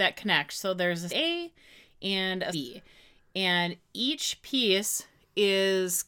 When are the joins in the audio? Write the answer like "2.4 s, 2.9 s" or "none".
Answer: 1.1 s, 2.5 s